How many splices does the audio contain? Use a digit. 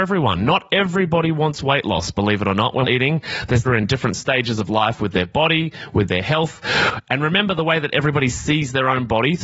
2